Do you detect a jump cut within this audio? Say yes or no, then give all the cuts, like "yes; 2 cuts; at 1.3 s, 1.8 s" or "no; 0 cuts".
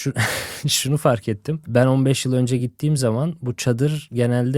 no; 0 cuts